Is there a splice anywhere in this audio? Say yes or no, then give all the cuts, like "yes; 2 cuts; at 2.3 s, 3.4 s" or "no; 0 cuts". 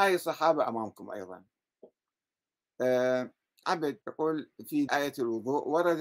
yes; 3 cuts; at 3.6 s, 4.0 s, 4.9 s